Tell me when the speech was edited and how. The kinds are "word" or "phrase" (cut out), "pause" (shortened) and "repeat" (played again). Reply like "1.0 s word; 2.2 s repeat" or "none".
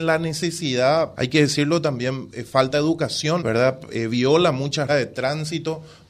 1.1 s word; 3.4 s word; 4.9 s word